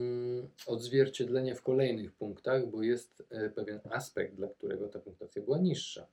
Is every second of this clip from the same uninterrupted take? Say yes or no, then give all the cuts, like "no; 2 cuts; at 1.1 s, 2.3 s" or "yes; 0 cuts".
yes; 0 cuts